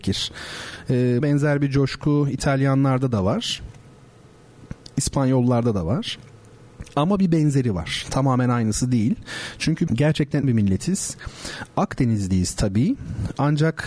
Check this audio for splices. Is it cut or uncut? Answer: cut